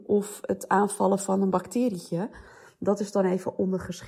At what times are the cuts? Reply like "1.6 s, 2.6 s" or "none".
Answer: none